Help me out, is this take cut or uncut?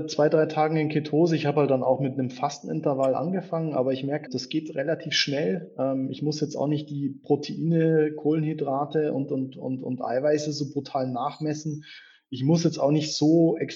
cut